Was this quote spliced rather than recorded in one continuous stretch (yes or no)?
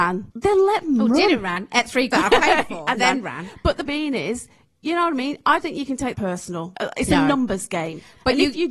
yes